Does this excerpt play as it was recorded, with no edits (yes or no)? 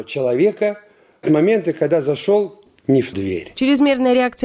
no